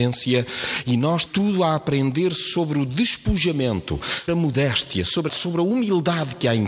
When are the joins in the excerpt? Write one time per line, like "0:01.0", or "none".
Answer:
0:01.3
0:04.3
0:05.3